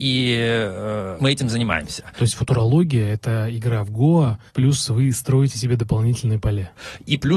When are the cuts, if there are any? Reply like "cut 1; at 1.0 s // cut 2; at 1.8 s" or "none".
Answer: cut 1; at 1.2 s // cut 2; at 4.5 s